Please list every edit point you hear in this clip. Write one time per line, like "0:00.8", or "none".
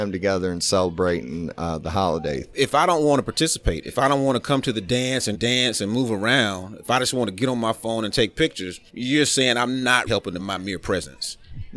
0:05.3
0:08.9
0:10.1
0:10.4